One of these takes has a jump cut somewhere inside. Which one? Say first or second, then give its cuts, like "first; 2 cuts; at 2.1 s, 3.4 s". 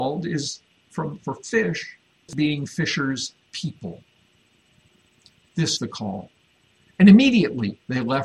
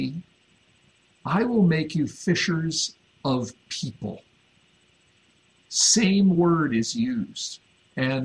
first; 4 cuts; at 1.2 s, 2.3 s, 3.5 s, 5.8 s